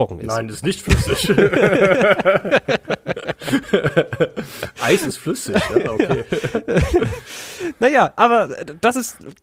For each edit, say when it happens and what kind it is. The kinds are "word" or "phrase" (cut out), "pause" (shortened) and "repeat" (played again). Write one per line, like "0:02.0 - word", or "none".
none